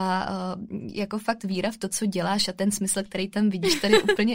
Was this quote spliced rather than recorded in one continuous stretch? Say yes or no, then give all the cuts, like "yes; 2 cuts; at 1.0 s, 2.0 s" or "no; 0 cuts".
no; 0 cuts